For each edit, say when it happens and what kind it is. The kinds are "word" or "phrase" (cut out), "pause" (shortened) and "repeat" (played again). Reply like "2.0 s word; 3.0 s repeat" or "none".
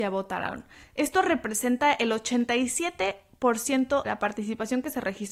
4.0 s word